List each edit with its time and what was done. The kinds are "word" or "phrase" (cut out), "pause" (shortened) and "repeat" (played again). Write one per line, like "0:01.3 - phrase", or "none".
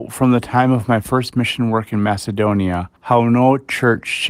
0:03.0 - pause